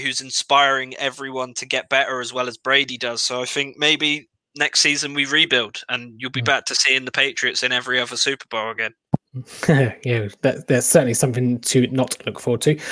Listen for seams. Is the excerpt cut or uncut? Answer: cut